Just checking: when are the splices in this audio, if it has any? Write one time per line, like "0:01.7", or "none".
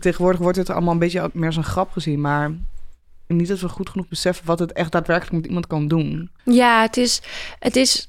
0:03.3
0:06.4